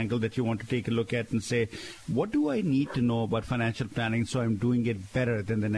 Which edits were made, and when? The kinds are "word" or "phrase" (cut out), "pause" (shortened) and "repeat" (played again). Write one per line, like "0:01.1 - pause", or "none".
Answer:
none